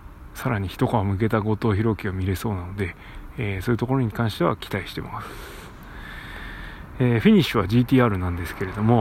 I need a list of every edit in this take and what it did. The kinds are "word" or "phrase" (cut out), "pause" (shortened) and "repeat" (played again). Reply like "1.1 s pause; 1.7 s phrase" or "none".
none